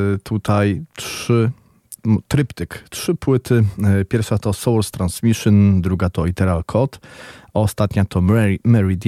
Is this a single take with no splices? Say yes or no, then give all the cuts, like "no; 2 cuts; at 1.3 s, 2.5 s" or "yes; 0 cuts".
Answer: no; 1 cut; at 2.0 s